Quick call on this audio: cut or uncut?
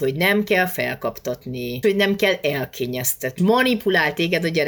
cut